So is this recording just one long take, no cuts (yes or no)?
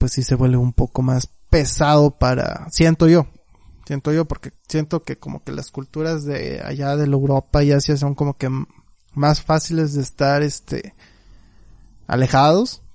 yes